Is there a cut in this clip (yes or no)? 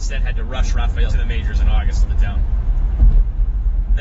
yes